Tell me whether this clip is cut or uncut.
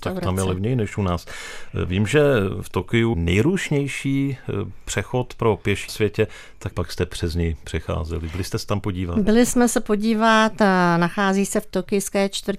cut